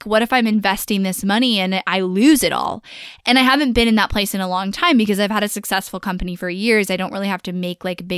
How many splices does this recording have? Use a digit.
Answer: 0